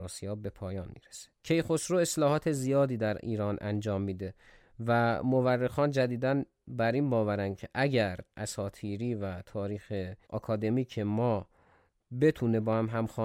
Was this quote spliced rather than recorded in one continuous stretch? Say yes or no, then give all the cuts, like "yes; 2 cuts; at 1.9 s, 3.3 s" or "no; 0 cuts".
yes; 2 cuts; at 8.3 s, 10.2 s